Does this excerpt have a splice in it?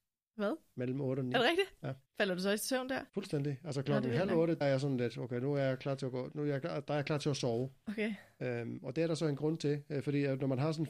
yes; 3 cuts; at 2.1 s, 3.1 s, 4.6 s

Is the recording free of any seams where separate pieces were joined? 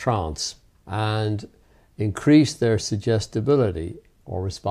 yes; 0 cuts

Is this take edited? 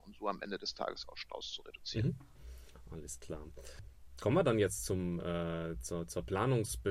no; 0 cuts

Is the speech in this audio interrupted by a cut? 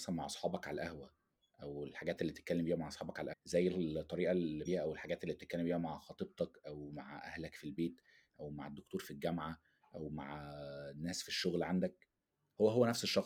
yes; 2 cuts; at 3.3 s, 4.7 s

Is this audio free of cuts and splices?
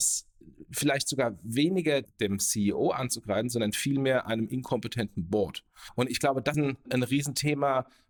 no; 1 cut; at 6.5 s

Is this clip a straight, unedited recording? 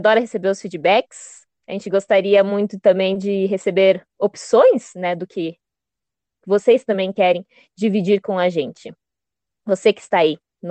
yes; 0 cuts

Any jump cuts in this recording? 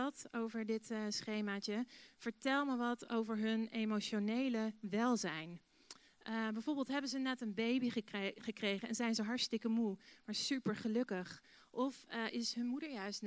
no; 0 cuts

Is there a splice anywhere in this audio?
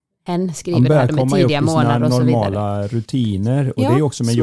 no; 0 cuts

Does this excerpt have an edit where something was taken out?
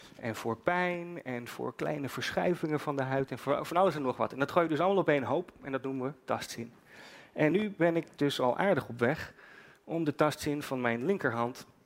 no; 0 cuts

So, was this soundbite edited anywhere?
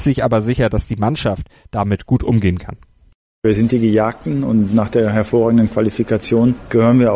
no; 0 cuts

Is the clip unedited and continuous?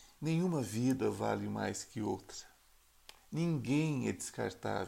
no; 1 cut; at 3.2 s

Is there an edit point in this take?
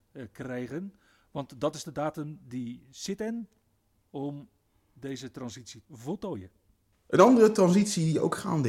yes; 2 cuts; at 4.1 s, 5.8 s

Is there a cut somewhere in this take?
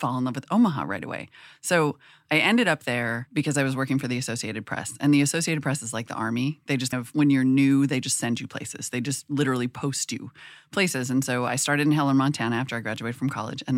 yes; 1 cut; at 6.9 s

